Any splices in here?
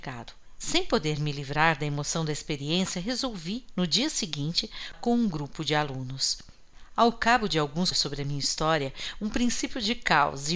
yes; 2 cuts; at 4.9 s, 7.9 s

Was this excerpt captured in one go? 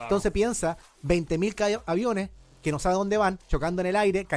yes; 0 cuts

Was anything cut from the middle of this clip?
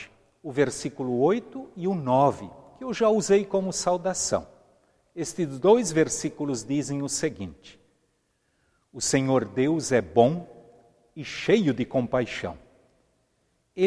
no; 0 cuts

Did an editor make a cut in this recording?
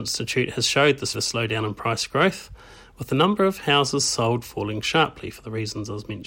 yes; 1 cut; at 1.1 s

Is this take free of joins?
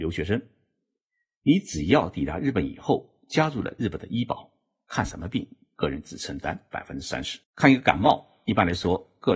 no; 1 cut; at 7.4 s

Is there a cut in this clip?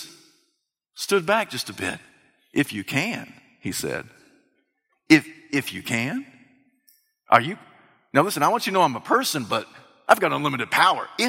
no; 0 cuts

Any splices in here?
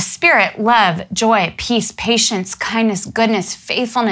no; 0 cuts

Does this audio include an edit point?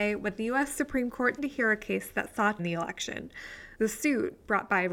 yes; 2 cuts; at 1.4 s, 2.6 s

